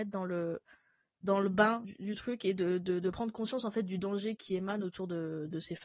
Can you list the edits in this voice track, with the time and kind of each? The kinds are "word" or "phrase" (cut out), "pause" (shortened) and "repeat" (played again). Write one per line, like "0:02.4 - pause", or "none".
0:01.8 - word
0:04.4 - word

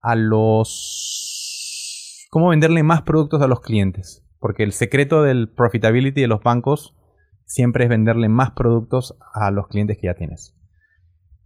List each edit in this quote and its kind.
none

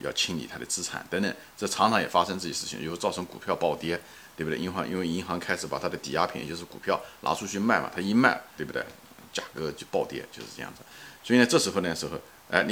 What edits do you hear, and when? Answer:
0:08.6 - word

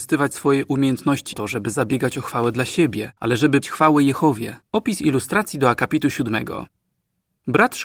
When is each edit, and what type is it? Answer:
0:01.3 - phrase
0:03.2 - pause
0:03.6 - word
0:04.6 - pause

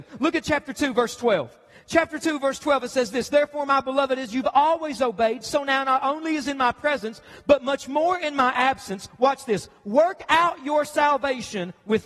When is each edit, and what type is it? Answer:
none

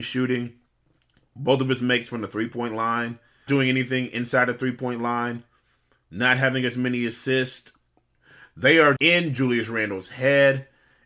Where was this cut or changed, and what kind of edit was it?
0:03.5 - word
0:09.0 - word

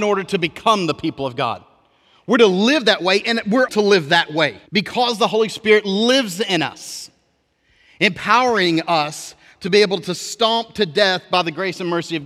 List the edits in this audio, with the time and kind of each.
0:03.7 - phrase
0:04.7 - pause

